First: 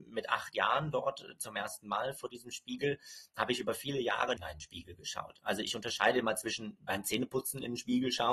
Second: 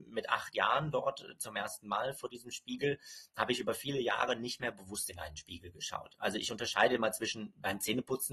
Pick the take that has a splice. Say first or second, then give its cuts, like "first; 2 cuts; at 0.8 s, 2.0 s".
first; 1 cut; at 4.4 s